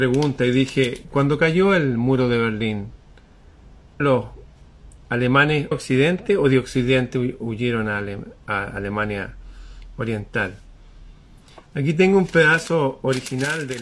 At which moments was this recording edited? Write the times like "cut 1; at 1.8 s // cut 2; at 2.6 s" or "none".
cut 1; at 4.0 s // cut 2; at 5.7 s